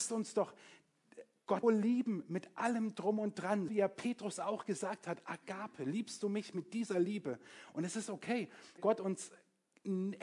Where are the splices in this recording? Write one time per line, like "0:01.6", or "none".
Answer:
0:01.6
0:03.7
0:08.8